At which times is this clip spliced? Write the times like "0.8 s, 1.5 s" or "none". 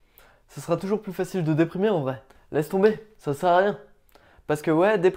2.3 s

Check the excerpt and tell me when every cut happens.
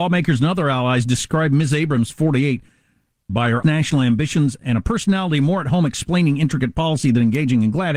3.3 s, 3.6 s

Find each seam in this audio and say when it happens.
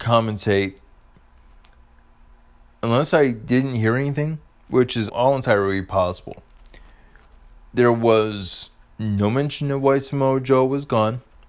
5.1 s

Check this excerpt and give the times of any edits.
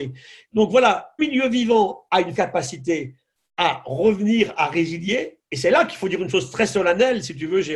1.2 s, 2.3 s

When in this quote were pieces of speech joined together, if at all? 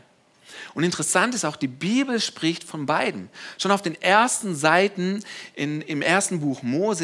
none

